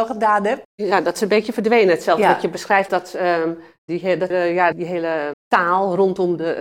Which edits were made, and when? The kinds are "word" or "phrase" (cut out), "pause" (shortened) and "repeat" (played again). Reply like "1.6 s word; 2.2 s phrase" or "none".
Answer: 2.9 s word; 4.3 s word; 4.7 s word; 5.3 s word